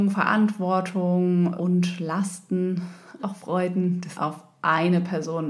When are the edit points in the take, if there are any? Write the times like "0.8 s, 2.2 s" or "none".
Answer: 1.6 s, 3.2 s, 4.1 s